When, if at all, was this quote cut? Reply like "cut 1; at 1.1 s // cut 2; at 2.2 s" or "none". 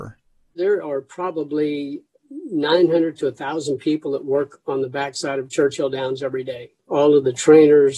cut 1; at 6.8 s